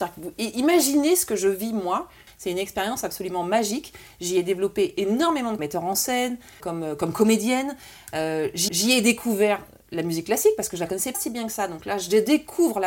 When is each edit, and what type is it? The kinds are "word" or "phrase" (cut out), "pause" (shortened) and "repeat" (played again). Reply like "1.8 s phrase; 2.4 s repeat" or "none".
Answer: 5.6 s phrase; 6.6 s word; 8.7 s repeat; 11.1 s word